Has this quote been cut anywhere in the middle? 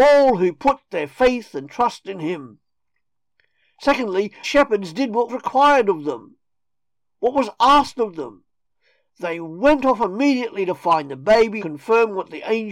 yes; 3 cuts; at 4.4 s, 5.3 s, 11.6 s

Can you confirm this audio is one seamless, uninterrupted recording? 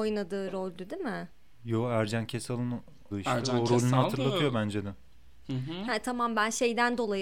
no; 1 cut; at 3.1 s

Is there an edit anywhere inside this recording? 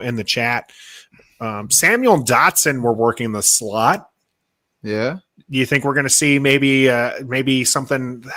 no; 0 cuts

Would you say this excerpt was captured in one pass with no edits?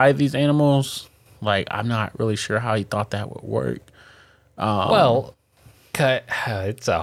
yes; 0 cuts

